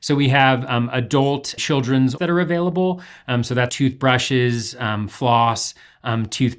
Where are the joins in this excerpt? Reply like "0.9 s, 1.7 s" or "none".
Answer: 1.6 s, 2.2 s, 3.7 s